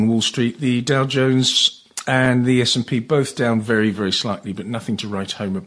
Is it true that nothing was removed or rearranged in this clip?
yes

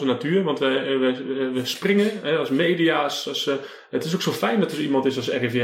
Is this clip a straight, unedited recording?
yes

